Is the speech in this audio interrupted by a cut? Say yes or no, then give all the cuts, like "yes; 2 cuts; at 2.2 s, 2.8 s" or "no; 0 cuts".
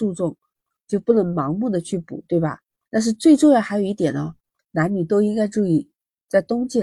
no; 0 cuts